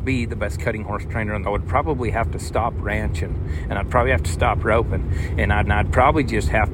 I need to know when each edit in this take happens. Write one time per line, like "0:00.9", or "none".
0:01.4
0:05.7